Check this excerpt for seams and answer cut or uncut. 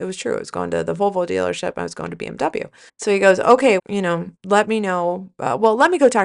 cut